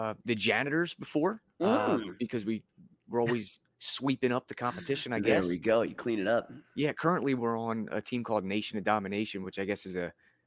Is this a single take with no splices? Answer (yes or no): yes